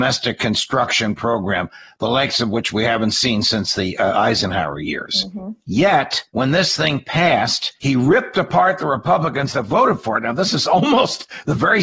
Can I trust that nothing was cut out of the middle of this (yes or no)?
no